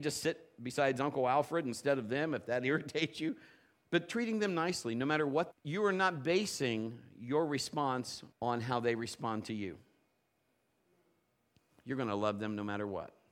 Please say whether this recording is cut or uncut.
cut